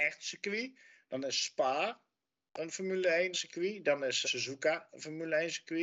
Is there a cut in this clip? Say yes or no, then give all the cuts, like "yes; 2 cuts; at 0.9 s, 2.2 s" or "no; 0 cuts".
yes; 2 cuts; at 3.3 s, 4.2 s